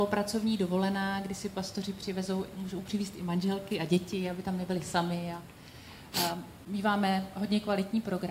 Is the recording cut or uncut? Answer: uncut